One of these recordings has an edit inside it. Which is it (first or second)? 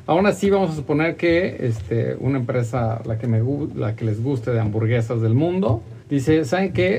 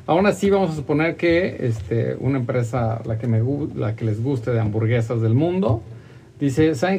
first